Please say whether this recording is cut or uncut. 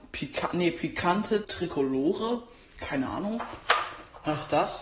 cut